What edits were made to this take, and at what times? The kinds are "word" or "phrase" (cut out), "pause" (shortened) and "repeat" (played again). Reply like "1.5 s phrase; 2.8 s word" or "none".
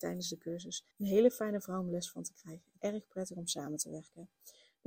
0.9 s pause; 2.8 s word